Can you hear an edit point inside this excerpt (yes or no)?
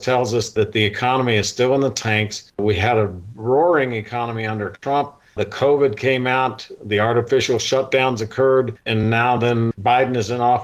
no